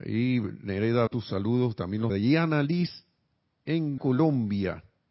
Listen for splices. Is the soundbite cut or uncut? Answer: cut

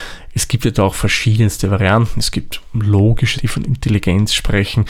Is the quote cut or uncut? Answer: cut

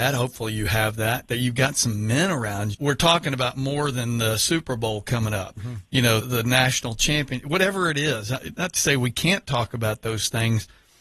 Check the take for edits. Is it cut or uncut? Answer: cut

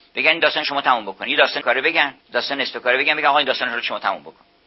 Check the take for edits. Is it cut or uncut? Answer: cut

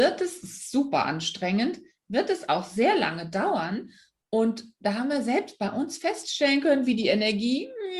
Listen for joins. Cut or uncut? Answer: uncut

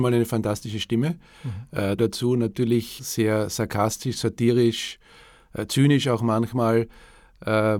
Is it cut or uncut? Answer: cut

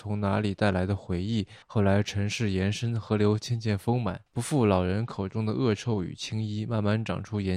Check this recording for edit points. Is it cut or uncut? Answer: cut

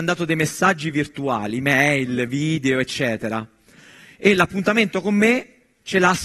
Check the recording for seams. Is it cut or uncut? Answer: uncut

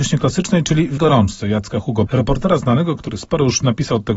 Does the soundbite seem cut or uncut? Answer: cut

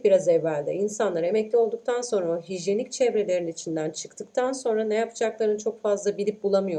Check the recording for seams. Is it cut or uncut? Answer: uncut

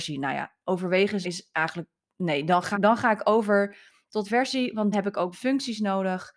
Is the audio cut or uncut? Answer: cut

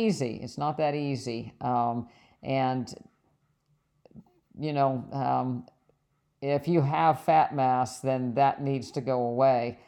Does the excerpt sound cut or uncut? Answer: uncut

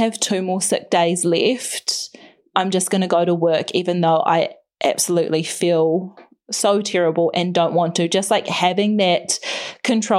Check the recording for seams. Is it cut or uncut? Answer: uncut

